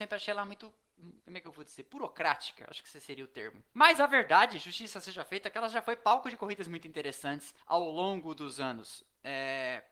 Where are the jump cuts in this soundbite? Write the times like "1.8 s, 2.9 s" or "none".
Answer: 1.2 s, 3.7 s, 7.6 s